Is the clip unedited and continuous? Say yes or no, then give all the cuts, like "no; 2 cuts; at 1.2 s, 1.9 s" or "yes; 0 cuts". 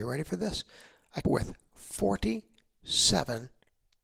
no; 1 cut; at 1.2 s